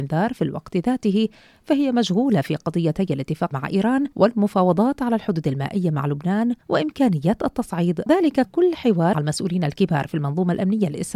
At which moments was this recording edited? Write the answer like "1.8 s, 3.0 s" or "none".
3.5 s, 4.1 s, 6.6 s, 8.1 s, 8.4 s, 9.1 s